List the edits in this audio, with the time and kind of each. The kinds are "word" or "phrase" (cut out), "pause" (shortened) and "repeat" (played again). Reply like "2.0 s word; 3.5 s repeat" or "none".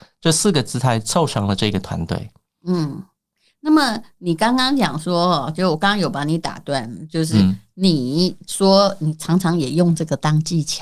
none